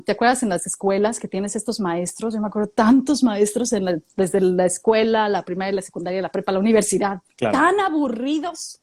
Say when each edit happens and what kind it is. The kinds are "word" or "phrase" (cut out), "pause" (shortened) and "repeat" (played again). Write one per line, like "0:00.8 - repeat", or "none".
0:07.3 - pause